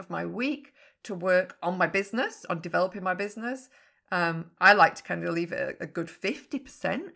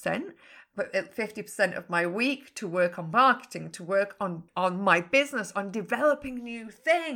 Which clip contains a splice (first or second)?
second